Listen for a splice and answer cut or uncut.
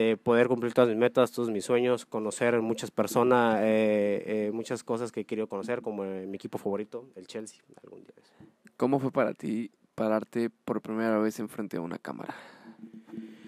uncut